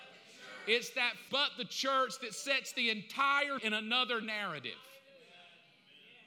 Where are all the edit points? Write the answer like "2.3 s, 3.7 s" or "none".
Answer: 1.3 s, 3.6 s

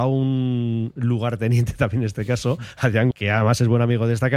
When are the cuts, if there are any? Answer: 3.1 s

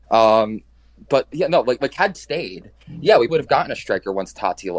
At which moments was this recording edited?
1.3 s, 2.1 s, 3.3 s

